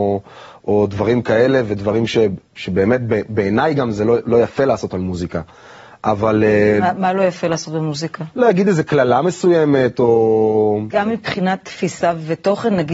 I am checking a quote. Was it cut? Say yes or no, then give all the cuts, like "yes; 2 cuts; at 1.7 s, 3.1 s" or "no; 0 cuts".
no; 0 cuts